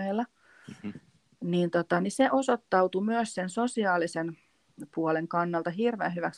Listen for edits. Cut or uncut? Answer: uncut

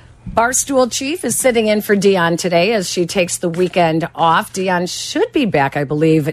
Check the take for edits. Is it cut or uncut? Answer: uncut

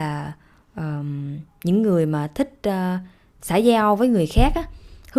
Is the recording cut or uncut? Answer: uncut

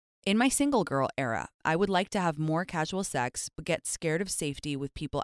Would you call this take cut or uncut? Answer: uncut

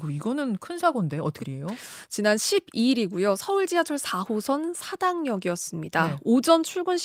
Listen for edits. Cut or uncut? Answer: cut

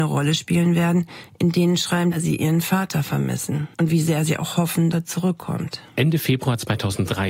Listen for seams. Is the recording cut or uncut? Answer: cut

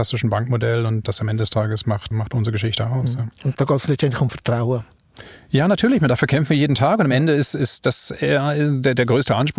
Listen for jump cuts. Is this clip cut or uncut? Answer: cut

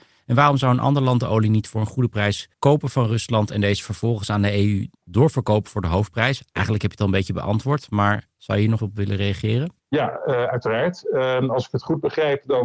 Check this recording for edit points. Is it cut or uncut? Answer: cut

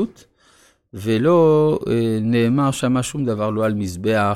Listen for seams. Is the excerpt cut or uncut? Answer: uncut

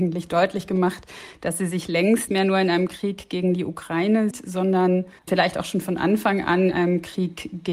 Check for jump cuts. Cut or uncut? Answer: cut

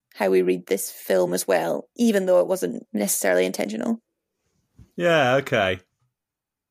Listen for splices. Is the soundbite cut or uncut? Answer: uncut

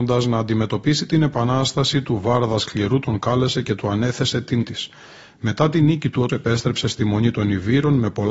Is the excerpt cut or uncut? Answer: cut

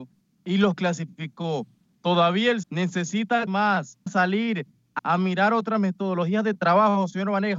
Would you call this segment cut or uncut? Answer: cut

